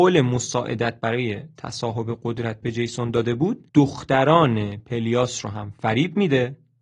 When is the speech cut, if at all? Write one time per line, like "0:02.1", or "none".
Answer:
0:03.7